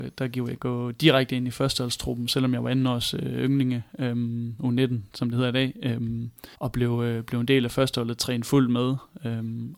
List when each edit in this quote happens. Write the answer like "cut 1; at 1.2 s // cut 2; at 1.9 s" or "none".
cut 1; at 6.5 s

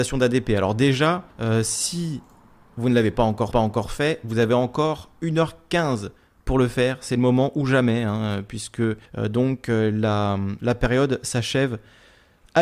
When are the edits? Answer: cut 1; at 1.3 s // cut 2; at 3.5 s // cut 3; at 9.1 s

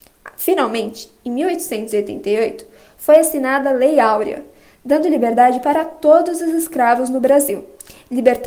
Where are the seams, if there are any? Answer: none

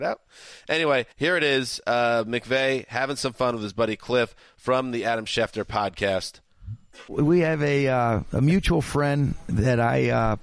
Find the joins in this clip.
cut 1; at 1.1 s

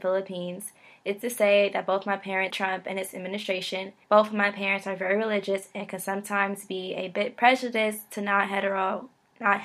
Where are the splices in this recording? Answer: cut 1; at 1.2 s // cut 2; at 2.5 s // cut 3; at 4.0 s

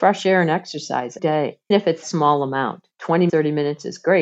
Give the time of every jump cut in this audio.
cut 1; at 1.2 s // cut 2; at 1.7 s // cut 3; at 2.0 s // cut 4; at 3.3 s

